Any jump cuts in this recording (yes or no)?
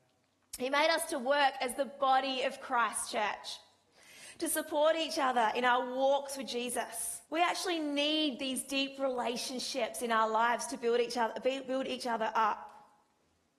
yes